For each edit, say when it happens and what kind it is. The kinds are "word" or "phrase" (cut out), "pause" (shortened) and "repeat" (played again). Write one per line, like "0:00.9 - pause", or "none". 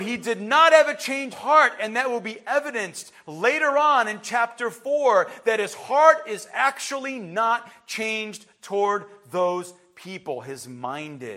0:01.3 - word